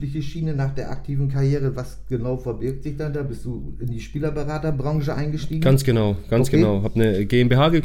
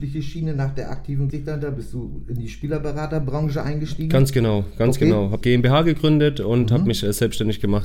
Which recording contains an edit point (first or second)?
second